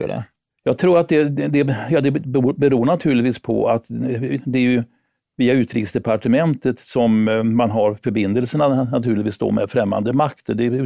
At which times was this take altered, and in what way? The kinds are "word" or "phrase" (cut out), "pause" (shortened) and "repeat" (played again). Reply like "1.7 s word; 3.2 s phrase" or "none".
none